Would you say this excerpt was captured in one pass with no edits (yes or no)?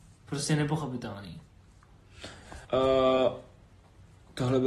no